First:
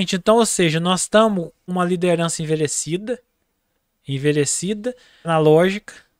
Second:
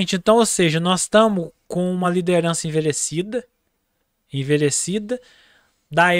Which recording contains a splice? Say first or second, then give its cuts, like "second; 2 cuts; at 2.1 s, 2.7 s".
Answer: first; 2 cuts; at 1.7 s, 5.2 s